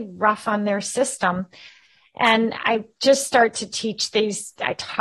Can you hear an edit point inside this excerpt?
no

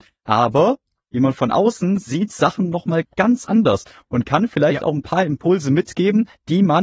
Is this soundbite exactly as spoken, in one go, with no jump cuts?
yes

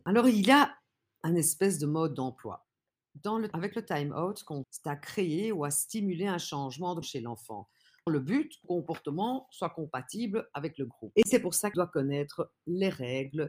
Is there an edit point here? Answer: yes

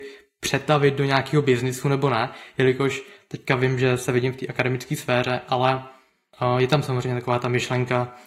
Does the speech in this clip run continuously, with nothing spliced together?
yes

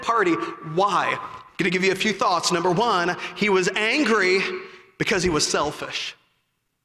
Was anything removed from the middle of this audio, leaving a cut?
no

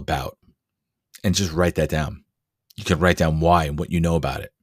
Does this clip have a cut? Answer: no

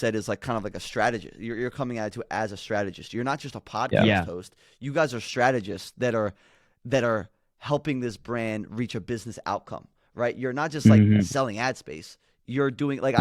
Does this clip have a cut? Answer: no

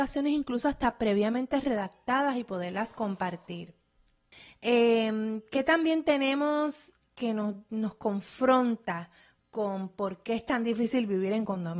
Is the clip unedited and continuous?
yes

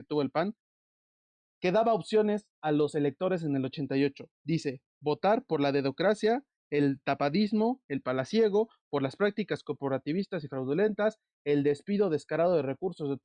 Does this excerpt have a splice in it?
yes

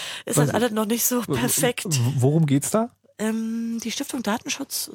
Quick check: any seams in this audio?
no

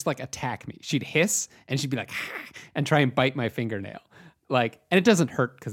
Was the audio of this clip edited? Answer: no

